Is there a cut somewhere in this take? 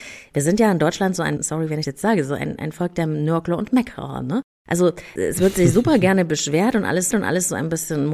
yes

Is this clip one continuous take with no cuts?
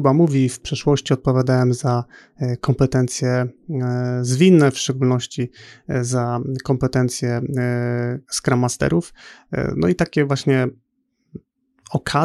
yes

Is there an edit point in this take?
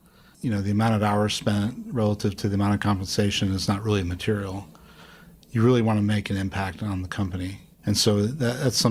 no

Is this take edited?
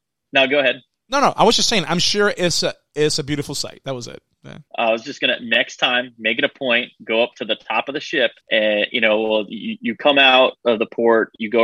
yes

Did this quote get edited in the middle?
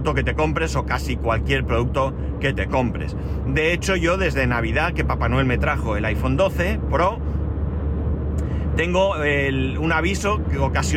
no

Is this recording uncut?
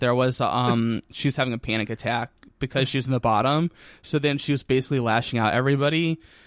yes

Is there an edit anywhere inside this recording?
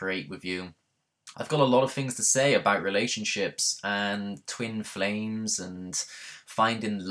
yes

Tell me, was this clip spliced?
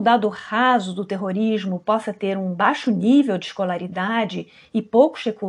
no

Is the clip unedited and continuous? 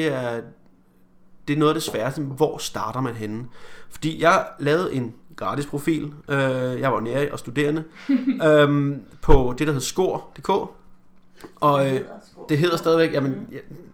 yes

